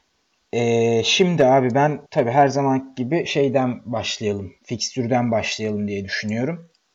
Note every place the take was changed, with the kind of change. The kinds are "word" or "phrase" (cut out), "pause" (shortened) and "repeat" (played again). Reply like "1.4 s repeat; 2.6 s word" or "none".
2.1 s pause